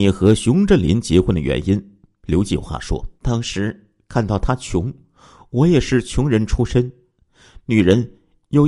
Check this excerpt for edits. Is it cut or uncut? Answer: cut